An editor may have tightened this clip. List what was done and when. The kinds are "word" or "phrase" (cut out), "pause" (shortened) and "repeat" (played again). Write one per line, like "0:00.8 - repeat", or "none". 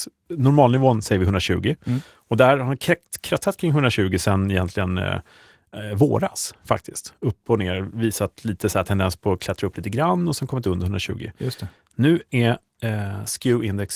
none